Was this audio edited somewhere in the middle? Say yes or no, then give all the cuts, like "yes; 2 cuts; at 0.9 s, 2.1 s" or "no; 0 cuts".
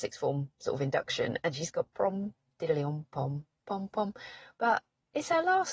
no; 0 cuts